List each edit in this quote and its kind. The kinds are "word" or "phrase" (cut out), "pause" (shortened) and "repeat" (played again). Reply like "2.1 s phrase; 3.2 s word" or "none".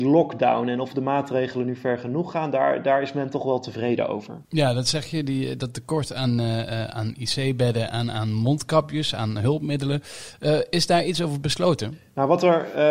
4.4 s pause